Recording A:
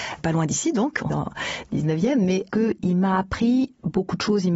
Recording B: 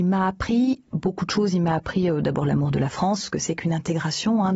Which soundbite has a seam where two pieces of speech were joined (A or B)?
A